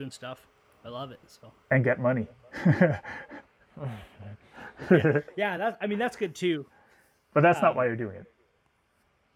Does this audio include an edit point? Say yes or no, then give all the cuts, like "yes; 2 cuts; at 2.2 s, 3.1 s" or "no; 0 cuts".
no; 0 cuts